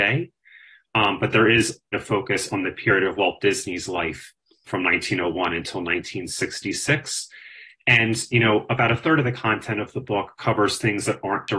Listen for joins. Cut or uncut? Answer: cut